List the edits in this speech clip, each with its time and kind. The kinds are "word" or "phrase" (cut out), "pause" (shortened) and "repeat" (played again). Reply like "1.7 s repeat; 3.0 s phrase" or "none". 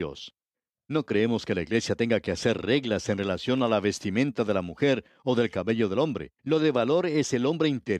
6.4 s pause